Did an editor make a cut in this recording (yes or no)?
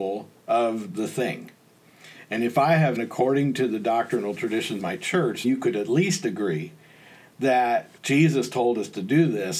yes